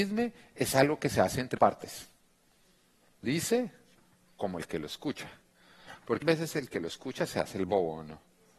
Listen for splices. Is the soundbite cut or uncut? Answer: cut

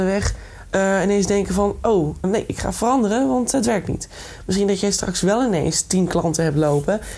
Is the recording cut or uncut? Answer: cut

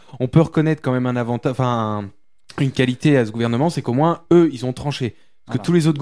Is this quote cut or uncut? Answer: uncut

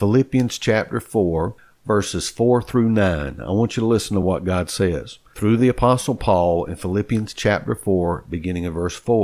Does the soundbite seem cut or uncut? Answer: uncut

